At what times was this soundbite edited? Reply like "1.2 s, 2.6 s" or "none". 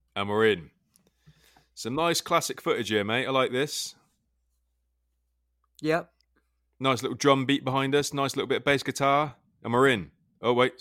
none